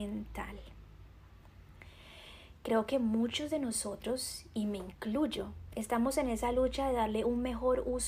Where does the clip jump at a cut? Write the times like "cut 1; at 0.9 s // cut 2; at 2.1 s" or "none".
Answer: none